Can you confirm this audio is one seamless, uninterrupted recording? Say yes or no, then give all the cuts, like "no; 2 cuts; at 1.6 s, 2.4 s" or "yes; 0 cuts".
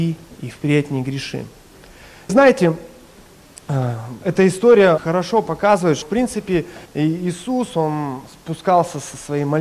no; 4 cuts; at 2.3 s, 5.0 s, 6.0 s, 6.8 s